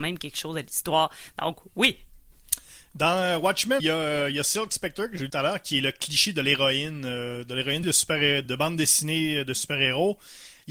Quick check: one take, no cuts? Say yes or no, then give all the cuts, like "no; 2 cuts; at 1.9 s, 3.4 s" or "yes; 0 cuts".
no; 4 cuts; at 3.8 s, 5.3 s, 7.8 s, 8.4 s